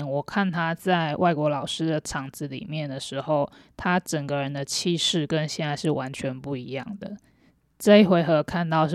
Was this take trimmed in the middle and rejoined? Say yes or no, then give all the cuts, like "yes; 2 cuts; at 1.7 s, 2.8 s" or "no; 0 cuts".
no; 0 cuts